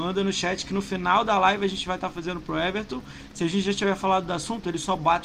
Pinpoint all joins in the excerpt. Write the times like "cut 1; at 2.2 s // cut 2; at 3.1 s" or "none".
none